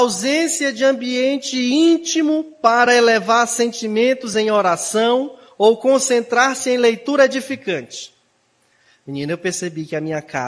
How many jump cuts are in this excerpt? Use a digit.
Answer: 0